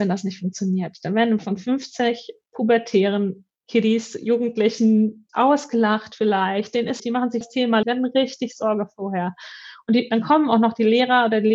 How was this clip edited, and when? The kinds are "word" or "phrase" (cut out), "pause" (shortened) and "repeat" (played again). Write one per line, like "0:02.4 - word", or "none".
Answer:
0:01.4 - phrase
0:03.6 - pause
0:05.3 - word
0:07.0 - word
0:07.4 - word
0:07.8 - word